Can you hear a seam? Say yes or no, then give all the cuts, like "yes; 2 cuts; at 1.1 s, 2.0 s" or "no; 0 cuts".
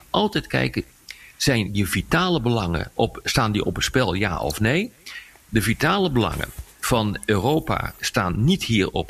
no; 0 cuts